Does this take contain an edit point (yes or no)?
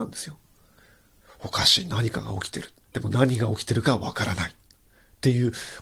yes